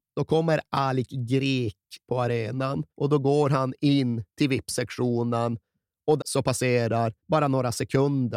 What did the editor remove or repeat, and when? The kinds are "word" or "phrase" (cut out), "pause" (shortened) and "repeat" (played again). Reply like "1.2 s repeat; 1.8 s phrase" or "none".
2.0 s word; 2.9 s pause; 4.3 s pause; 6.2 s word; 7.2 s pause